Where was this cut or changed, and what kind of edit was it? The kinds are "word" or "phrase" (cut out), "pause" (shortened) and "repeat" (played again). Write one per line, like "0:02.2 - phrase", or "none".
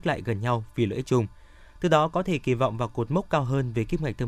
none